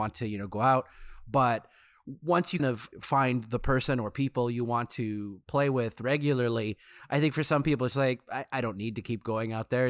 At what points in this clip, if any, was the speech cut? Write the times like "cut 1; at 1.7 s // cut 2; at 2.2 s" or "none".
cut 1; at 2.6 s // cut 2; at 7.9 s